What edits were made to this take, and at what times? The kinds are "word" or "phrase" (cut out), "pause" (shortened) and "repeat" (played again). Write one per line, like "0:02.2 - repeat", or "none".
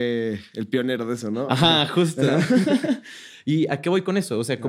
none